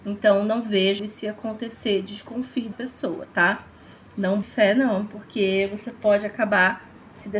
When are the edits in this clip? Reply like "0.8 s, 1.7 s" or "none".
1.0 s, 2.7 s, 4.4 s